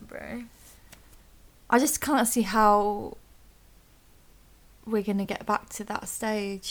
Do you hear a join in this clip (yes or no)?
no